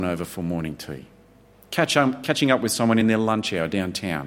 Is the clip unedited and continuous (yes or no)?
yes